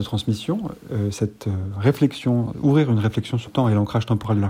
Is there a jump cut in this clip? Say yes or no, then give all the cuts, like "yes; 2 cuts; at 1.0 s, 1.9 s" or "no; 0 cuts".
yes; 1 cut; at 3.5 s